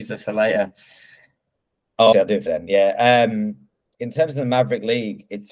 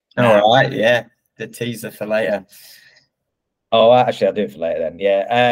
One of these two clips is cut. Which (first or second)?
first